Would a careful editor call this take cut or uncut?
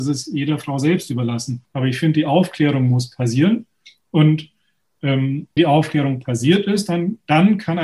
cut